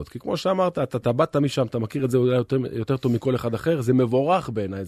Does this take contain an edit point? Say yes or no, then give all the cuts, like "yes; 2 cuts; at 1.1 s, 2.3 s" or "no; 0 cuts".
no; 0 cuts